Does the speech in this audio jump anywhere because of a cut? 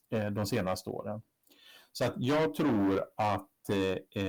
no; 0 cuts

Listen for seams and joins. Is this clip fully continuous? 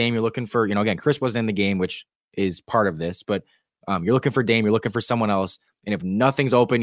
yes; 0 cuts

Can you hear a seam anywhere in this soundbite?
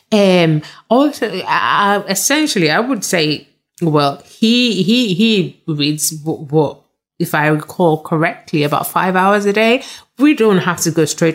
no; 0 cuts

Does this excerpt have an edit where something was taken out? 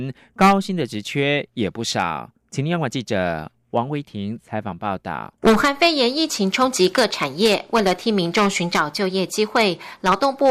yes; 1 cut; at 5.4 s

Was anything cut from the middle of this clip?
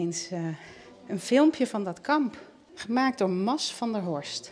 no; 0 cuts

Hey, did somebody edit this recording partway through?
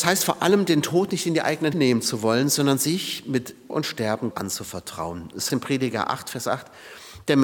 yes; 4 cuts; at 1.7 s, 3.7 s, 4.3 s, 5.5 s

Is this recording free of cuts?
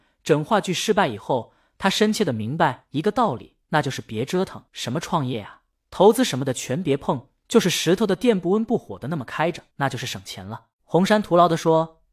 no; 4 cuts; at 3.6 s, 4.7 s, 9.7 s, 10.7 s

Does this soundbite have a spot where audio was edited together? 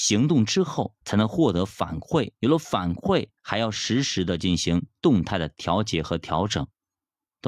yes; 3 cuts; at 1.0 s, 2.4 s, 3.4 s

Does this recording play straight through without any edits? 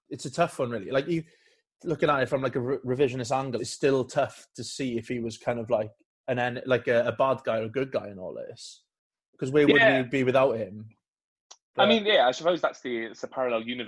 no; 1 cut; at 3.6 s

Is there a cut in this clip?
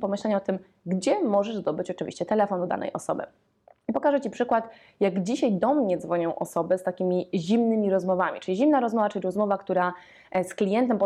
no; 0 cuts

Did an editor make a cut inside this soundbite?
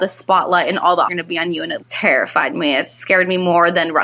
yes; 2 cuts; at 1.0 s, 1.8 s

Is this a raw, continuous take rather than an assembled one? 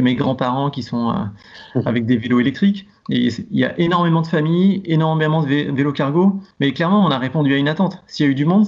no; 1 cut; at 6.5 s

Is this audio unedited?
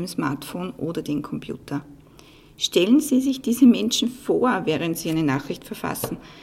yes; 0 cuts

